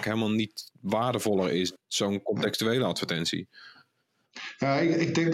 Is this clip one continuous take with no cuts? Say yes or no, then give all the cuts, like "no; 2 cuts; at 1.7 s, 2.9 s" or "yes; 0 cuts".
no; 1 cut; at 1.8 s